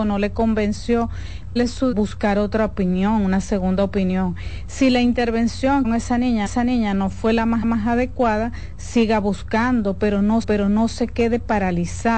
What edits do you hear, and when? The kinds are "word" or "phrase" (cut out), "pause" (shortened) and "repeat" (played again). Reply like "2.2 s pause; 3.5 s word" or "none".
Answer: 1.6 s word; 1.9 s word; 5.8 s phrase; 6.5 s repeat; 7.6 s repeat; 10.4 s repeat